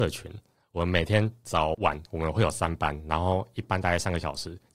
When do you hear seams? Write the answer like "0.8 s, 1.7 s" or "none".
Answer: 1.7 s